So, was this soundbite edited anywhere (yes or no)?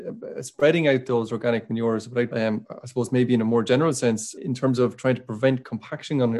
yes